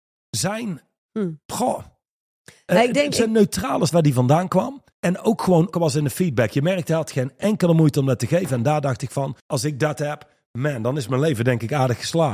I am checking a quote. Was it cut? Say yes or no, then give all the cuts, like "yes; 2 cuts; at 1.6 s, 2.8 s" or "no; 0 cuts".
yes; 5 cuts; at 1.4 s, 3.9 s, 4.9 s, 5.7 s, 9.4 s